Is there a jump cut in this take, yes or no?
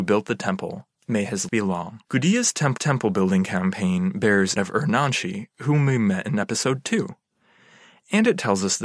yes